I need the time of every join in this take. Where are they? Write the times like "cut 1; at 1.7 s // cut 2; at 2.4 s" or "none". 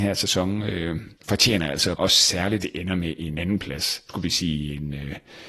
cut 1; at 1.9 s // cut 2; at 2.6 s // cut 3; at 3.3 s // cut 4; at 4.1 s